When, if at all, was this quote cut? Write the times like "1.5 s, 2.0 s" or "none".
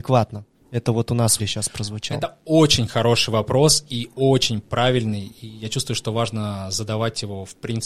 1.4 s